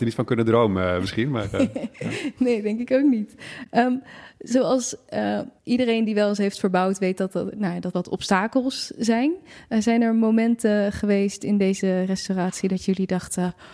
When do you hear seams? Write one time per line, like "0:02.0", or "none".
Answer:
0:05.6
0:07.9